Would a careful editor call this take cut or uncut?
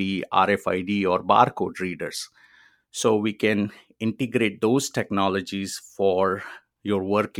uncut